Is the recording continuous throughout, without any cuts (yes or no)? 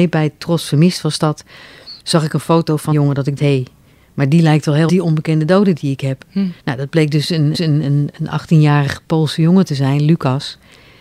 no